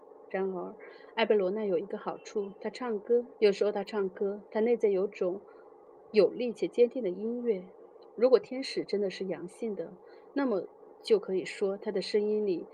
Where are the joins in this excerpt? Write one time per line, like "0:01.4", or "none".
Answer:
0:03.3